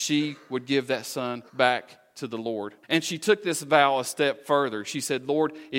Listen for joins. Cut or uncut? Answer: cut